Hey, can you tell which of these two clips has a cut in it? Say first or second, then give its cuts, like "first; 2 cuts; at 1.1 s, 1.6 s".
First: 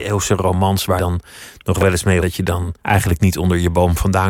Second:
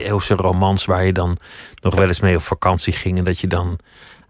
first; 3 cuts; at 1.0 s, 2.2 s, 2.8 s